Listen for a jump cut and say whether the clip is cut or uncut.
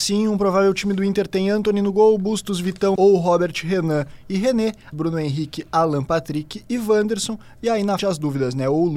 cut